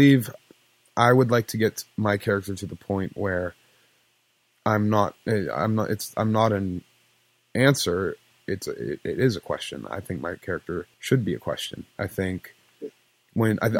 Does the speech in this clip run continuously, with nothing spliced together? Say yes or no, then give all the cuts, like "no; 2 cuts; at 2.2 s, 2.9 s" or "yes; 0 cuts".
no; 3 cuts; at 1.9 s, 10.9 s, 11.9 s